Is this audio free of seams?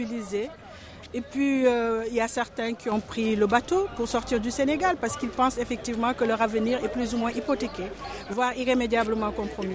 yes; 0 cuts

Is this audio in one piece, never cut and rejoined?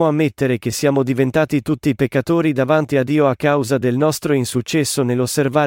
yes; 0 cuts

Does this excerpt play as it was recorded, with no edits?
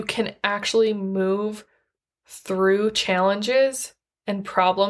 yes; 0 cuts

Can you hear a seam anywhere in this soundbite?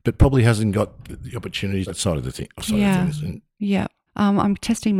yes; 3 cuts; at 1.1 s, 1.9 s, 4.1 s

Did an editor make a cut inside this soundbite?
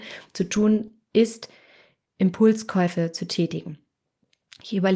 no; 0 cuts

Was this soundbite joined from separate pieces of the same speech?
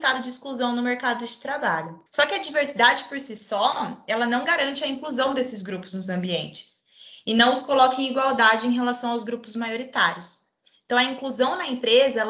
yes; 1 cut; at 2.1 s

